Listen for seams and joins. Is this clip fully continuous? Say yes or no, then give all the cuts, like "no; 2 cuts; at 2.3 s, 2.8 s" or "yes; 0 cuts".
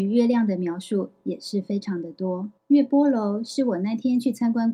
no; 1 cut; at 2.6 s